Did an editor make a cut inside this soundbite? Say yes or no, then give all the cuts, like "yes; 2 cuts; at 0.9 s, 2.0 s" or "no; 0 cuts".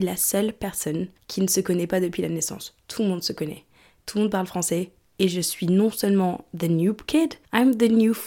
no; 0 cuts